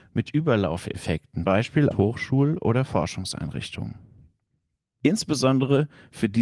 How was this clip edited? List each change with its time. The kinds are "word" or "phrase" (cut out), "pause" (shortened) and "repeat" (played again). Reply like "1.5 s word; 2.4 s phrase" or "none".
1.4 s word; 1.9 s word